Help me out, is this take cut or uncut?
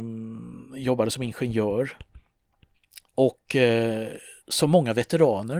cut